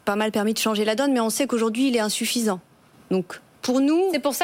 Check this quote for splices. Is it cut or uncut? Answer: uncut